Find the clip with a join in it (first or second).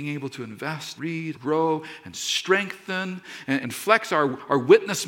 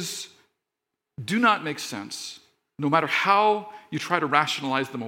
first